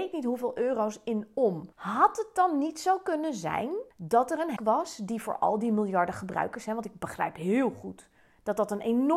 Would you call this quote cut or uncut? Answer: cut